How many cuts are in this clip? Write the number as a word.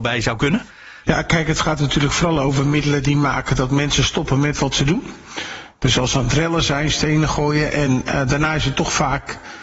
zero